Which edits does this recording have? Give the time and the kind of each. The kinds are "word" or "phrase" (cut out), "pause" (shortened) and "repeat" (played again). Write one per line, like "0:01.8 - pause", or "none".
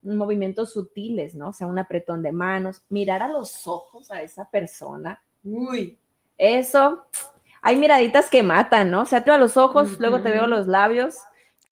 0:09.3 - word